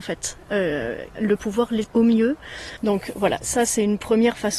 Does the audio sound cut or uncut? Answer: cut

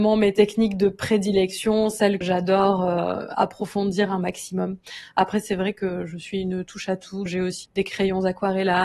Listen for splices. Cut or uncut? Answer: cut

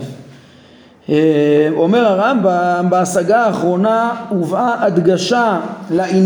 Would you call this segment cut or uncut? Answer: uncut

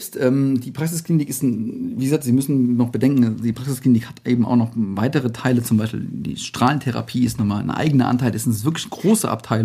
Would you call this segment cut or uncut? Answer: uncut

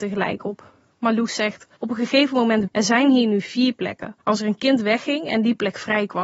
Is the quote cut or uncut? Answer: cut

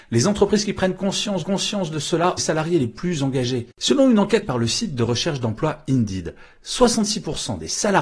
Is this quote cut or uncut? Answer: cut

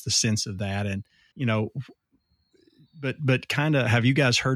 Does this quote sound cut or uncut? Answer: cut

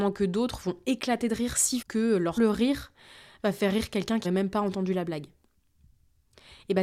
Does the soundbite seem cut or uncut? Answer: cut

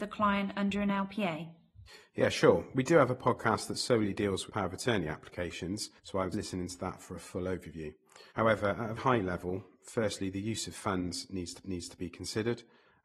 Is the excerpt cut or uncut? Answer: cut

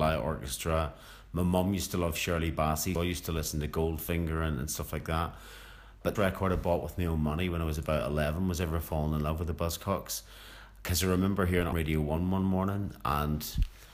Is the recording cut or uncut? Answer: cut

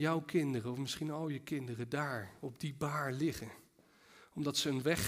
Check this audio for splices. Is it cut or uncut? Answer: uncut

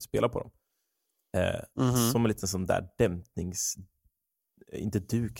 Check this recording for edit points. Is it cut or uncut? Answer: uncut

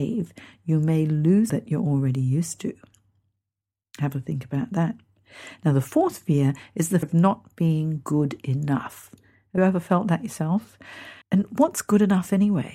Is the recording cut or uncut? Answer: cut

